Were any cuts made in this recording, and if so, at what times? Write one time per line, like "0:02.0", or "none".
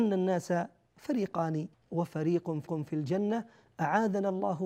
0:01.7
0:02.7